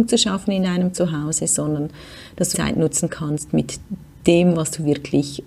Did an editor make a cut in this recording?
yes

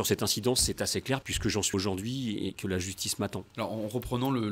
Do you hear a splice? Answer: yes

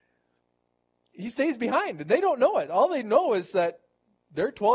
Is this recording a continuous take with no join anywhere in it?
yes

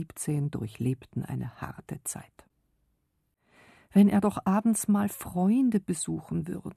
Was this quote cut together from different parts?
no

